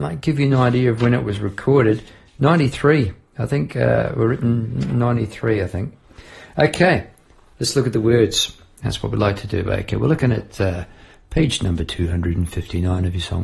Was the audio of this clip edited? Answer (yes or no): no